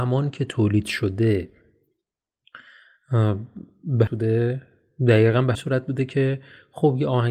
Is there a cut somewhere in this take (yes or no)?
yes